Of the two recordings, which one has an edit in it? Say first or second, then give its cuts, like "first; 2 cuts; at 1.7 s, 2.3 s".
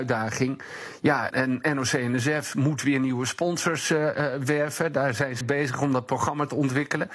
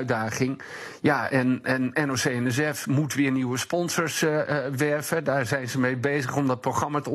first; 2 cuts; at 1.3 s, 5.4 s